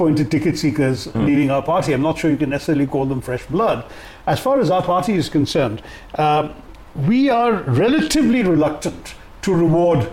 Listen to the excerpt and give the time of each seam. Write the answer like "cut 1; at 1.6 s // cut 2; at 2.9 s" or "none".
none